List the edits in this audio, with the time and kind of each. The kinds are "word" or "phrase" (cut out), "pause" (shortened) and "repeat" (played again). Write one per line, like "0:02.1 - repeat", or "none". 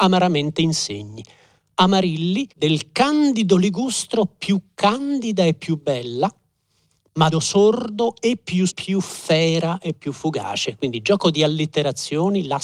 0:02.5 - pause
0:07.3 - word
0:08.7 - phrase